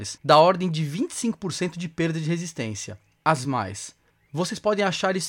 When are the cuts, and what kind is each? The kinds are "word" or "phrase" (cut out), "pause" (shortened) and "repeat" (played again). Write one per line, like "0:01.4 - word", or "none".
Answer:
0:03.4 - word